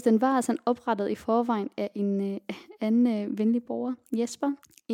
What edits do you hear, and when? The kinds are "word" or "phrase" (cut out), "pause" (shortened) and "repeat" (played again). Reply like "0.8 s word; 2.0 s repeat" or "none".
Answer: none